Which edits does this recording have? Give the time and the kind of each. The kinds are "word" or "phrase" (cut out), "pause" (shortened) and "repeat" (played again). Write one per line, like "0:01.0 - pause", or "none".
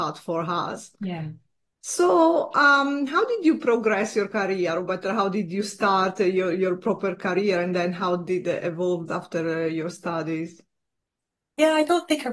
0:00.9 - pause
0:09.1 - phrase